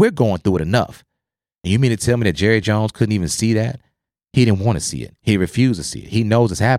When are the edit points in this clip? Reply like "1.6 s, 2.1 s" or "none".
none